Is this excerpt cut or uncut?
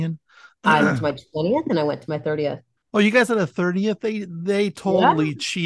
cut